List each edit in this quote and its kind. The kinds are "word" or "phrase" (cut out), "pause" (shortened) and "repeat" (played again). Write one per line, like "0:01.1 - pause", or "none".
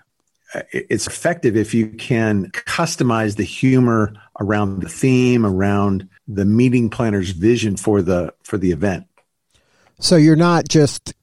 0:01.1 - word
0:02.5 - word
0:04.8 - phrase
0:06.2 - pause